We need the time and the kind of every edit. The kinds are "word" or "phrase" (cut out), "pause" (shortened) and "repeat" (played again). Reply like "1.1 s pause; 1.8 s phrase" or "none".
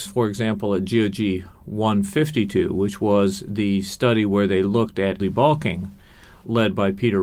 5.2 s word